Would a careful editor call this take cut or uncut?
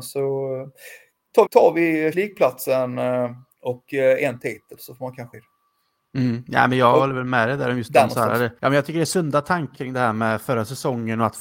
cut